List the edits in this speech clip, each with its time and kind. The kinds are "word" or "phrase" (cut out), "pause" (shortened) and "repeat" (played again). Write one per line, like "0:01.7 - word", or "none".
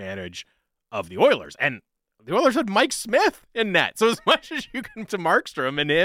0:05.1 - word